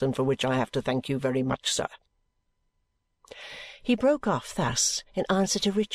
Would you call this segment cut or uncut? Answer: uncut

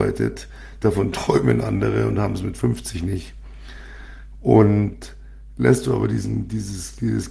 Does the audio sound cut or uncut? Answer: uncut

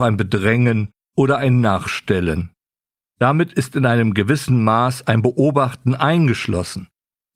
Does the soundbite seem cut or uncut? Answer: uncut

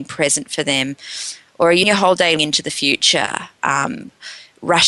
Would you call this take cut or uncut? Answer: cut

